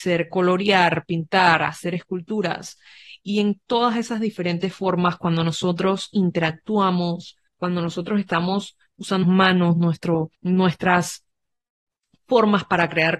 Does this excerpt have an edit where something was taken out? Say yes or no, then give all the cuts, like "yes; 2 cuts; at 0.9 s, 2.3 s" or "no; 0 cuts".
yes; 3 cuts; at 7.5 s, 9.2 s, 10.3 s